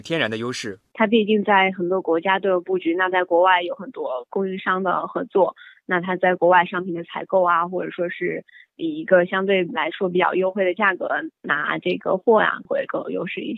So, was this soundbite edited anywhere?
no; 0 cuts

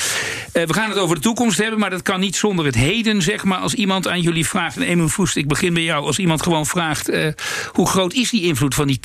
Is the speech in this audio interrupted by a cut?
no; 0 cuts

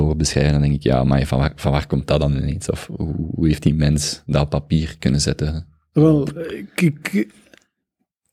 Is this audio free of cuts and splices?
yes; 0 cuts

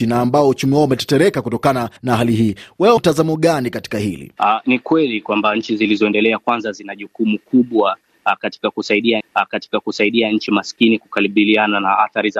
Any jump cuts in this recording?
yes; 4 cuts; at 2.0 s, 3.0 s, 4.6 s, 9.2 s

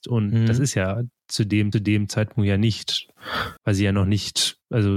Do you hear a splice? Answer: yes; 2 cuts; at 1.7 s, 3.6 s

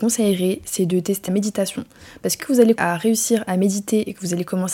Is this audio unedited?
no; 3 cuts; at 1.3 s, 2.4 s, 2.8 s

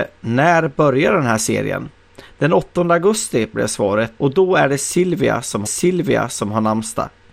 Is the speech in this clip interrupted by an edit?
yes; 2 cuts; at 4.2 s, 5.7 s

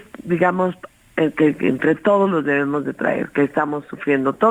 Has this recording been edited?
no; 0 cuts

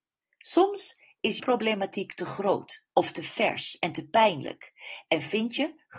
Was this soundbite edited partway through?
yes; 2 cuts; at 1.4 s, 2.9 s

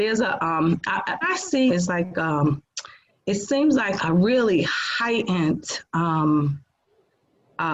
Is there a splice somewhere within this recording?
yes; 3 cuts; at 1.2 s, 1.7 s, 4.0 s

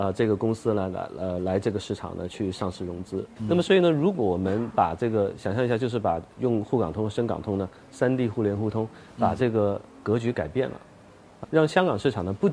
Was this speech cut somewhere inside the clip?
yes; 1 cut; at 11.4 s

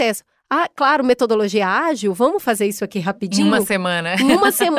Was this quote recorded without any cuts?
yes; 0 cuts

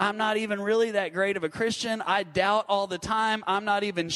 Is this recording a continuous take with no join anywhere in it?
yes; 0 cuts

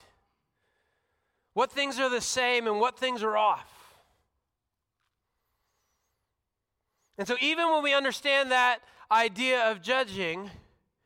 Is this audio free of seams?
yes; 0 cuts

